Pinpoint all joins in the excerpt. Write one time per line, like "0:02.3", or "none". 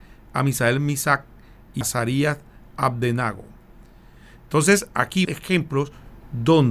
0:01.8
0:05.2

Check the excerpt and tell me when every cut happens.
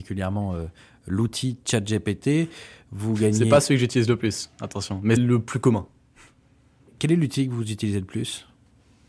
0:05.2

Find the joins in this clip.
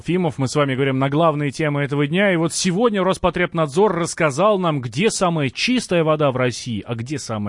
none

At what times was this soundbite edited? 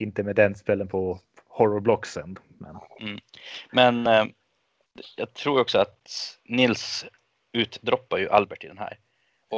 none

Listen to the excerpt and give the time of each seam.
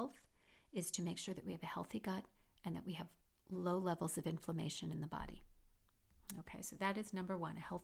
none

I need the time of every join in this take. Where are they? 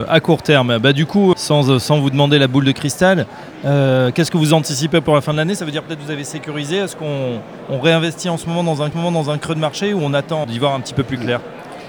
0:01.3
0:08.9
0:10.4

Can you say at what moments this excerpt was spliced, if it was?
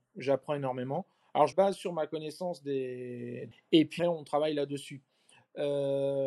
0:01.5
0:03.5
0:04.0

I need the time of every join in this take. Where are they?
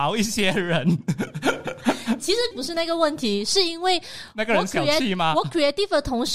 0:02.2
0:02.5

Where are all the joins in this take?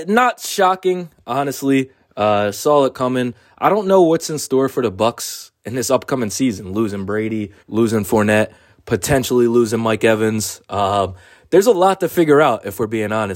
0:07.6

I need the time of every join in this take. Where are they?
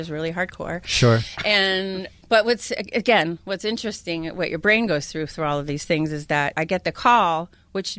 0:02.2
0:06.5

